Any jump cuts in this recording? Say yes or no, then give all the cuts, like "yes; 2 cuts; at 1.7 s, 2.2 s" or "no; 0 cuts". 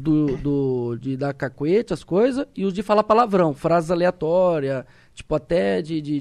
no; 0 cuts